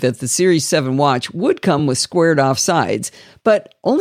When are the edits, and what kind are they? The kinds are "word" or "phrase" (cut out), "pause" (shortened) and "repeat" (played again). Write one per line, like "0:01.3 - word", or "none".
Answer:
none